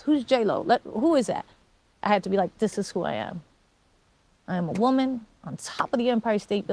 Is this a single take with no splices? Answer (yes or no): yes